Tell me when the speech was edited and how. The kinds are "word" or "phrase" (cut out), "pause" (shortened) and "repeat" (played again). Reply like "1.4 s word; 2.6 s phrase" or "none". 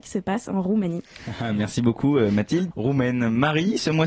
2.7 s phrase